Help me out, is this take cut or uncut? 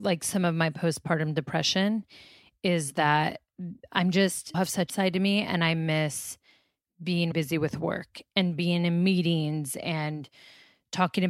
cut